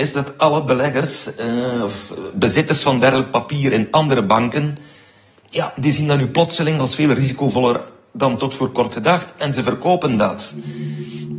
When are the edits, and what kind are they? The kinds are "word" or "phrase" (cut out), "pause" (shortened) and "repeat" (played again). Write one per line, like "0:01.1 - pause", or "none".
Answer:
none